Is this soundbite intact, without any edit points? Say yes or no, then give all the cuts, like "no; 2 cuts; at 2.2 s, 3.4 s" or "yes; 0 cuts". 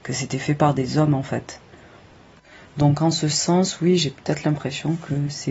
yes; 0 cuts